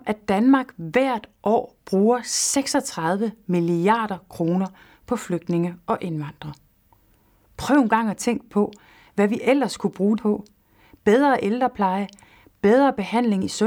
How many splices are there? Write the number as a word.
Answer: one